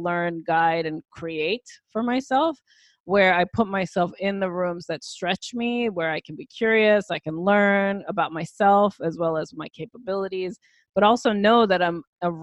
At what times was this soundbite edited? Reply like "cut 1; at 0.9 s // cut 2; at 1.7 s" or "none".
none